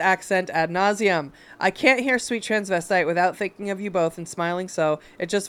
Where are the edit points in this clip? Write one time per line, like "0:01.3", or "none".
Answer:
none